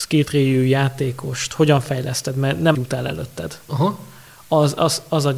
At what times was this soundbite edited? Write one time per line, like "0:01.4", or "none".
0:02.7